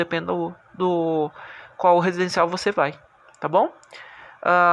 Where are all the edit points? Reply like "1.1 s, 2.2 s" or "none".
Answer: none